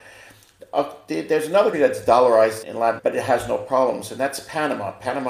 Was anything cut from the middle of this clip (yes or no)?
yes